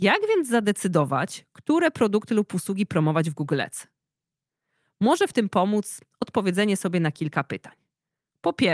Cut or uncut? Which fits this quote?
uncut